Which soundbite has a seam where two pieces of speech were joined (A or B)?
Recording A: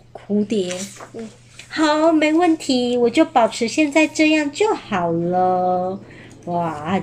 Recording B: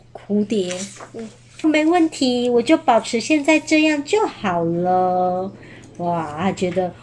B